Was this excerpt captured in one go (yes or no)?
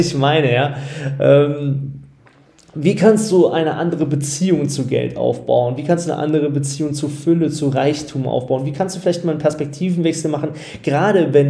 yes